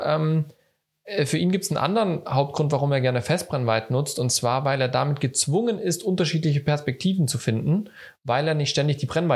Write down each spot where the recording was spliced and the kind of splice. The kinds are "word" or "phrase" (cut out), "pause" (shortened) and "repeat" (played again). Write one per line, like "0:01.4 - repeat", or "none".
none

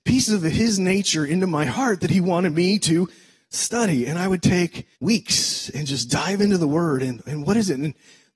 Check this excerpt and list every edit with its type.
0:04.9 - pause

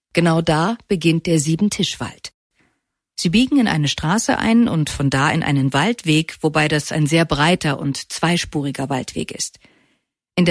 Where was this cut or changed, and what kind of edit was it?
none

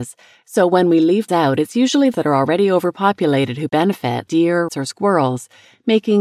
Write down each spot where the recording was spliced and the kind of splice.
0:01.3 - word
0:02.1 - word
0:04.3 - word
0:04.7 - word

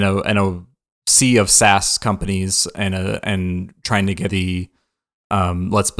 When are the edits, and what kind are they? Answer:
0:04.3 - word

